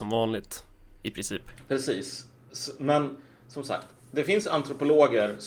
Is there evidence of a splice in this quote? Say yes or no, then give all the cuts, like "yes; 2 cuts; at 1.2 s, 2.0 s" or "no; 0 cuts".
no; 0 cuts